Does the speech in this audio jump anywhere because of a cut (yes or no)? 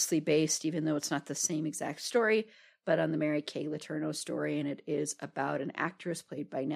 no